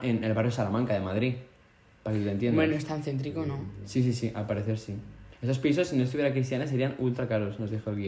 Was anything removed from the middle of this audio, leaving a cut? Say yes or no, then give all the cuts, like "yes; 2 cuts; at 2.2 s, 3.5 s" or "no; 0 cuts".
yes; 1 cut; at 5.3 s